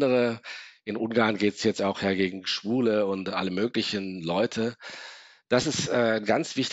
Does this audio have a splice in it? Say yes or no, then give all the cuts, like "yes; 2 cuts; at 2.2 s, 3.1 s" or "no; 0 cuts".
no; 0 cuts